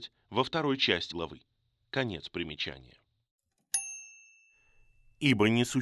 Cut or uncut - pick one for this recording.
cut